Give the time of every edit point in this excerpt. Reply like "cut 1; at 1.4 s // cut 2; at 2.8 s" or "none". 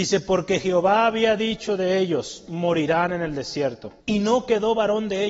cut 1; at 4.0 s